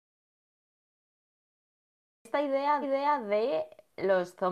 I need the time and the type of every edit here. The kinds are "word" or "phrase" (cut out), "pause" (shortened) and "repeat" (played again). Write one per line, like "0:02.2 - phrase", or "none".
0:02.8 - repeat